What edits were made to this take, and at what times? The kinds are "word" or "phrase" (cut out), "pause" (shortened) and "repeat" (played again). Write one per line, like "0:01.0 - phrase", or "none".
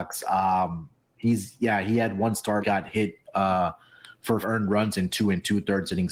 0:02.6 - phrase
0:04.4 - word